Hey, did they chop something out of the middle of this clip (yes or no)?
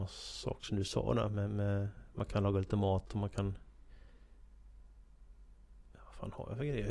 no